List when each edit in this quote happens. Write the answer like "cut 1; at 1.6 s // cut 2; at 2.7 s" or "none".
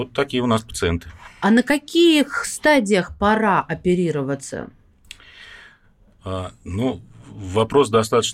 none